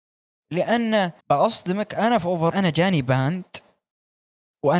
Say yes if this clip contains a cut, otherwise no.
yes